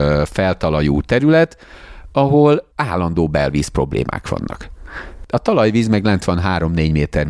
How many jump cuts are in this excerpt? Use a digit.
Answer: 1